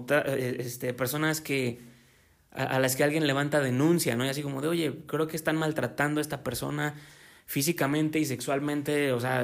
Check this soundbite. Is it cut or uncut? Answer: uncut